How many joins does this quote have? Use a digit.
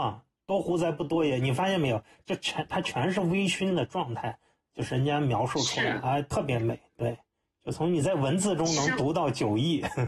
0